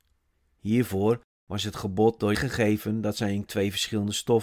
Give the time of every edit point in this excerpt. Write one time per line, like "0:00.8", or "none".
0:02.3
0:03.5